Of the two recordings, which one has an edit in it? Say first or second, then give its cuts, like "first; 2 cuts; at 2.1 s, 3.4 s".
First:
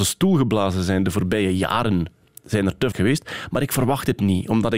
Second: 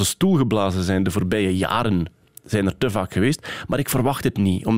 first; 1 cut; at 2.9 s